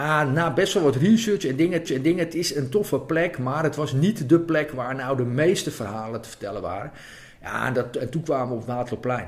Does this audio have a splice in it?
yes; 1 cut; at 1.9 s

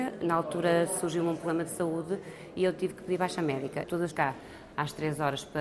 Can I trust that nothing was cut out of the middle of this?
no; 1 cut; at 4.1 s

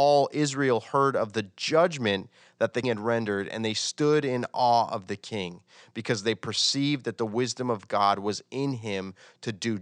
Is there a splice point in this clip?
yes; 1 cut; at 2.8 s

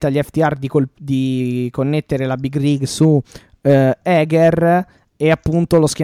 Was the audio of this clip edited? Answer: no; 0 cuts

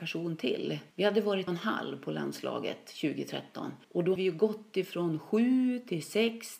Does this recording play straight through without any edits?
no; 4 cuts; at 0.9 s, 1.5 s, 3.8 s, 4.2 s

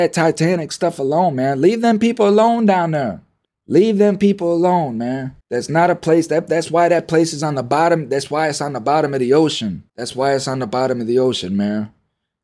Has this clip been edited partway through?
yes; 3 cuts; at 3.4 s, 5.4 s, 9.9 s

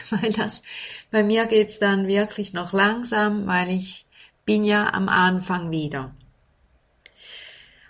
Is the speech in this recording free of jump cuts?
yes; 0 cuts

